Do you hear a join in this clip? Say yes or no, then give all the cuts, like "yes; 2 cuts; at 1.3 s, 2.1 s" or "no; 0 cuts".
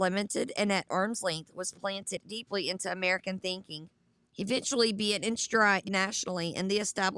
yes; 2 cuts; at 4.2 s, 5.8 s